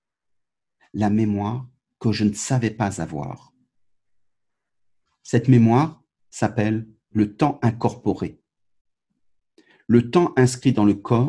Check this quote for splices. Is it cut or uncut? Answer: uncut